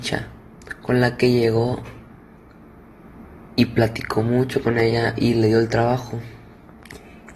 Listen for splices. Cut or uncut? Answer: uncut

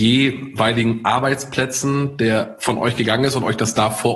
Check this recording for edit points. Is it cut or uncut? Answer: uncut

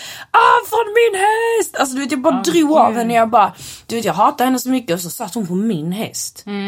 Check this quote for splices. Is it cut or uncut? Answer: uncut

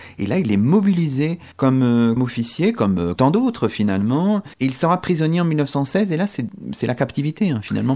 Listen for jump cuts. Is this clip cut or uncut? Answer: cut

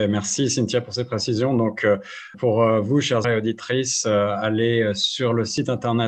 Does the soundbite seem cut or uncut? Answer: cut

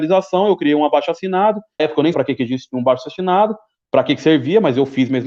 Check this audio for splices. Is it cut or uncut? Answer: cut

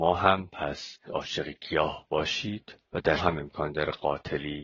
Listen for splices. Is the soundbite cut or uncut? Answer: cut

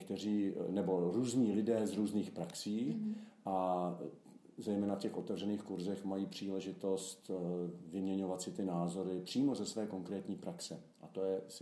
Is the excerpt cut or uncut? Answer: uncut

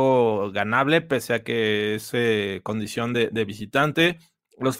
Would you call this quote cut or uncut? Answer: uncut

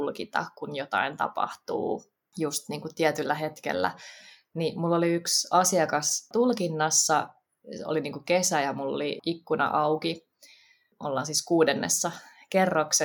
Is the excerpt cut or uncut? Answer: uncut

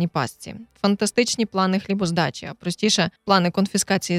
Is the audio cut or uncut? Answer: cut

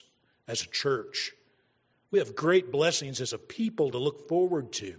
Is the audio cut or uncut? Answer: uncut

